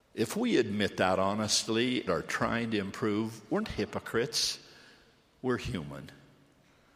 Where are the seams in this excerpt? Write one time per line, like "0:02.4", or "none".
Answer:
0:02.1
0:03.6

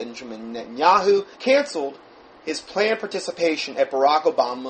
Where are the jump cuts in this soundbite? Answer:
0:01.3

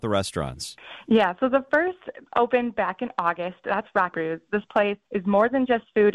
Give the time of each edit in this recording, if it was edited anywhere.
0:02.3
0:04.1
0:05.0

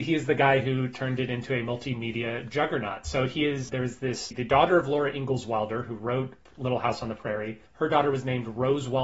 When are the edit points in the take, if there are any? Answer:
0:03.7
0:04.3
0:07.7

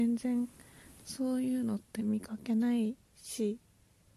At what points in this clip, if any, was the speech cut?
0:03.0

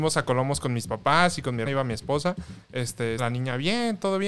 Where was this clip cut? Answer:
0:01.6
0:03.2

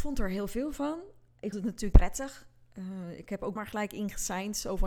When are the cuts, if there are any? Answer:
0:01.5
0:01.9
0:03.6

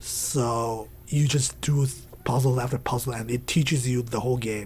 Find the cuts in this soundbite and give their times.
none

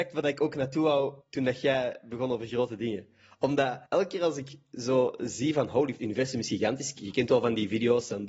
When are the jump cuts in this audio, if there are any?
0:01.2
0:03.9
0:06.0

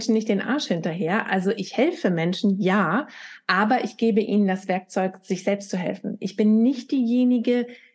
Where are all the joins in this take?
none

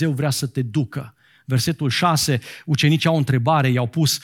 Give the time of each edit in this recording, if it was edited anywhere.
none

